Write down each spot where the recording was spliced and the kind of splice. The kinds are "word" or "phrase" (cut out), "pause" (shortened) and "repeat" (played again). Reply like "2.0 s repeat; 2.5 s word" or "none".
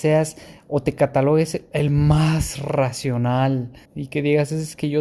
3.8 s pause

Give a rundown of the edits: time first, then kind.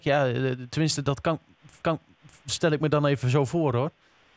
1.8 s repeat

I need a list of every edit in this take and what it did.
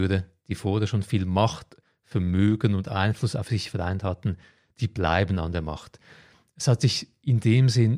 none

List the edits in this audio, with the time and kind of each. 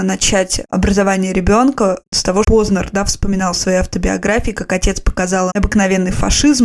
2.4 s word; 5.5 s word

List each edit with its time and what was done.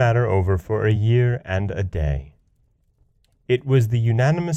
none

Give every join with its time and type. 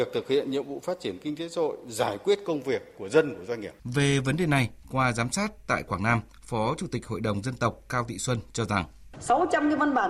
3.8 s pause

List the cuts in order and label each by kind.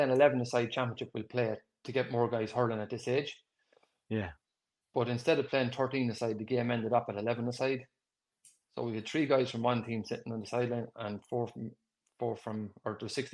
none

